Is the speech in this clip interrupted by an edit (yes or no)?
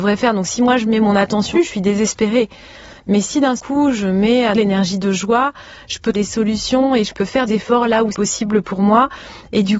yes